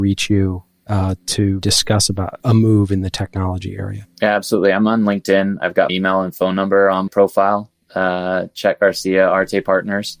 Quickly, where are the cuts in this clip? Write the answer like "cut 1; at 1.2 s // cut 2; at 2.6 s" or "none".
cut 1; at 1.6 s // cut 2; at 2.4 s // cut 3; at 5.9 s // cut 4; at 7.1 s